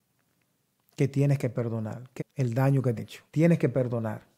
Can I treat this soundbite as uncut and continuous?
no; 3 cuts; at 2.2 s, 3.0 s, 3.3 s

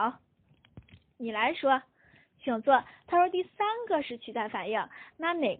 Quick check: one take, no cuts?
yes; 0 cuts

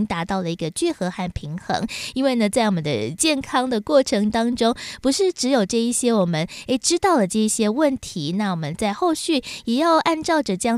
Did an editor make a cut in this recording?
no; 0 cuts

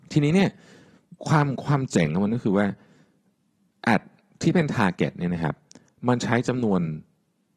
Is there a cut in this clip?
yes; 1 cut; at 1.2 s

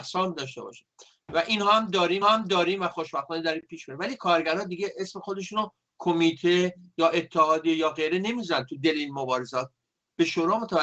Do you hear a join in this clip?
yes; 1 cut; at 2.2 s

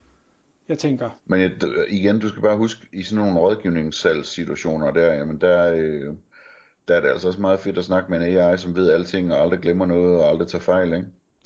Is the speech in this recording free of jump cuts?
no; 1 cut; at 1.2 s

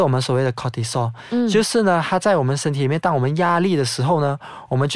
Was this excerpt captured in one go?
yes; 0 cuts

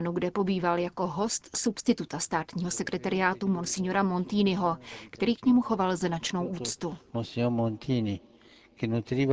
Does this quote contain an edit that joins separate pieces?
no; 0 cuts

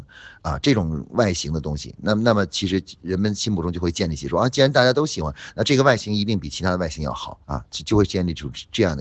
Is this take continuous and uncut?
no; 1 cut; at 7.4 s

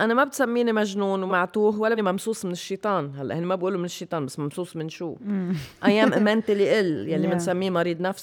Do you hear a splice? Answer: yes; 2 cuts; at 1.3 s, 2.0 s

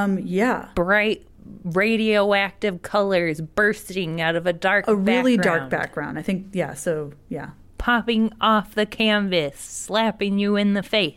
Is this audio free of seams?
yes; 0 cuts

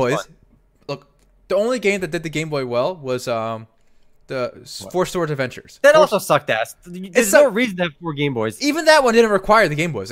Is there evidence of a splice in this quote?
no; 0 cuts

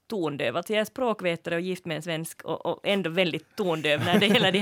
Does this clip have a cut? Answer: no; 0 cuts

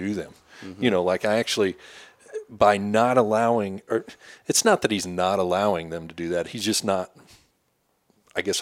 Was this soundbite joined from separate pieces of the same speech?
no; 0 cuts

